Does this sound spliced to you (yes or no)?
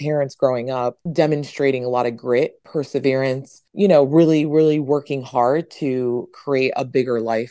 no